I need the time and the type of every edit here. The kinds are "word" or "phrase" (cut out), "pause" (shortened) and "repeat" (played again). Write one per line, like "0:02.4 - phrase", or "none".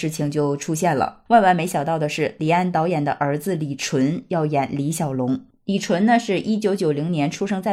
0:01.3 - pause